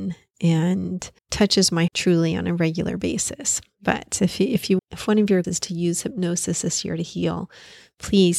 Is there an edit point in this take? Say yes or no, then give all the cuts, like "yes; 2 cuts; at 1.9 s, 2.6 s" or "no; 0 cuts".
yes; 4 cuts; at 1.2 s, 1.9 s, 4.8 s, 5.4 s